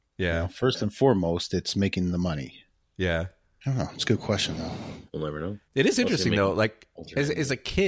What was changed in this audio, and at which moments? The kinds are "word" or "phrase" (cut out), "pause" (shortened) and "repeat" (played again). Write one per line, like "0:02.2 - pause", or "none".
0:05.1 - pause
0:05.7 - pause